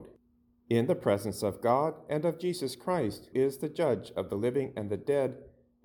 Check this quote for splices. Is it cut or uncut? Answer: cut